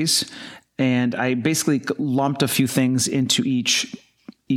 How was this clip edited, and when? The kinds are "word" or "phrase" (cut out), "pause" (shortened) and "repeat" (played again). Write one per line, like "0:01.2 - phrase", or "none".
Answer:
none